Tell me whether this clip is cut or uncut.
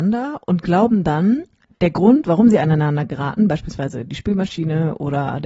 uncut